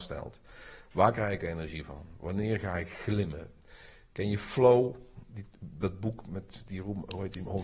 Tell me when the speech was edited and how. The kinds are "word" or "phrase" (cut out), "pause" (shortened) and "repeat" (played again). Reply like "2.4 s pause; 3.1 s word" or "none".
none